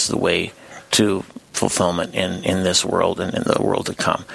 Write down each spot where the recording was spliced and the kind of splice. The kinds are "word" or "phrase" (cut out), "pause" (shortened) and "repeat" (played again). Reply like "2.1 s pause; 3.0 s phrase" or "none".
1.4 s pause